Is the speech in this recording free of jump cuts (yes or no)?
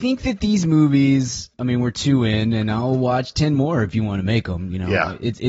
no